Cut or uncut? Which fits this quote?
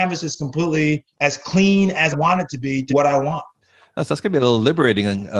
cut